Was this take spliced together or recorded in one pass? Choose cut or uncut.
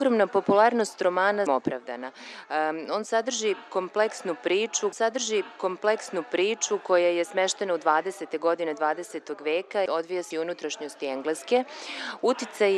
cut